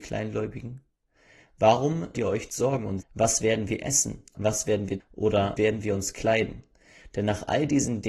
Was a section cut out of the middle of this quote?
yes; 6 cuts; at 2.1 s, 2.5 s, 3.0 s, 4.3 s, 5.0 s, 5.6 s

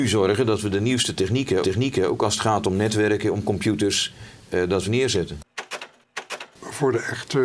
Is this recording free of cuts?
no; 2 cuts; at 1.6 s, 4.9 s

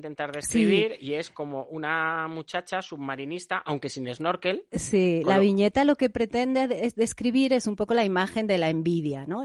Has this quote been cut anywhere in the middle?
no; 0 cuts

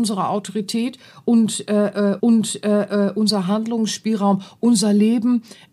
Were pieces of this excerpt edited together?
yes; 1 cut; at 2.2 s

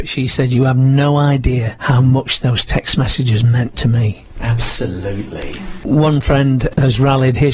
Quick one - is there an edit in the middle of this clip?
no; 0 cuts

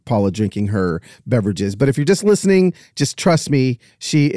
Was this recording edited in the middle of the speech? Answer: no; 0 cuts

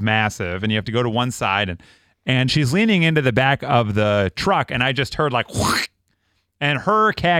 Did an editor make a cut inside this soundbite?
yes; 1 cut; at 2.5 s

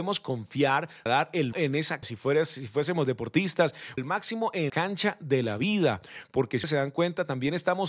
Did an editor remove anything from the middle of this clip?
yes; 6 cuts; at 1.1 s, 1.5 s, 2.0 s, 4.0 s, 4.7 s, 6.6 s

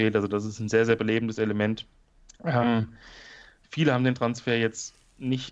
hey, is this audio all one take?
yes; 0 cuts

